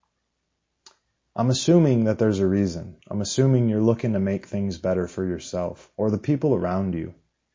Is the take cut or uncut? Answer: cut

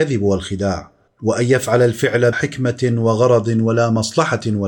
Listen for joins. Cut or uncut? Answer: cut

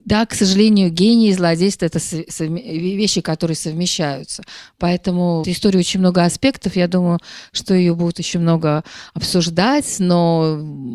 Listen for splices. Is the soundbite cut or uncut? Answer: cut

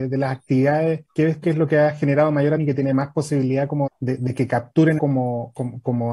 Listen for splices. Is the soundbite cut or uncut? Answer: cut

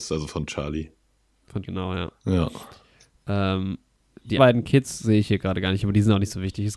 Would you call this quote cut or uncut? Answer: cut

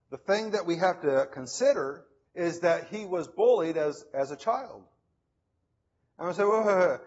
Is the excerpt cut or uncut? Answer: cut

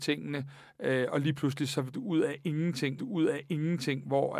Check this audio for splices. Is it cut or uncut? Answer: cut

